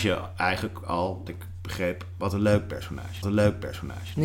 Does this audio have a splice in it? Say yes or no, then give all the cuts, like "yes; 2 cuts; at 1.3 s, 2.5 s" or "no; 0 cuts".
yes; 2 cuts; at 1.3 s, 3.2 s